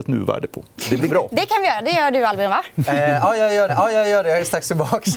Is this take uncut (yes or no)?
no